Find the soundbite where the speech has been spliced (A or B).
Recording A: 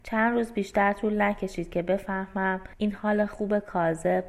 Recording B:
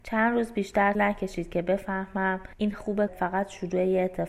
B